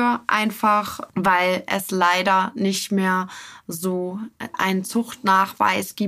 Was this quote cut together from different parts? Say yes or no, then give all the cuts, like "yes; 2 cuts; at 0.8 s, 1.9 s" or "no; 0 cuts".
no; 0 cuts